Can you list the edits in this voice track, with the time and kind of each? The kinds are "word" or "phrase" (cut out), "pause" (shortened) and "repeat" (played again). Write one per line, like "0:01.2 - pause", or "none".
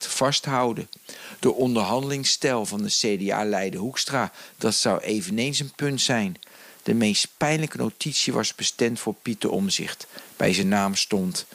none